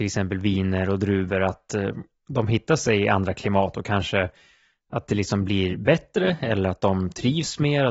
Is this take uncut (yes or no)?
yes